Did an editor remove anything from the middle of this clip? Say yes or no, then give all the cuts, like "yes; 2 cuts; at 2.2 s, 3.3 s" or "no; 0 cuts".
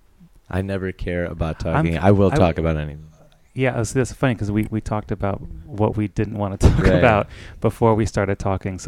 no; 0 cuts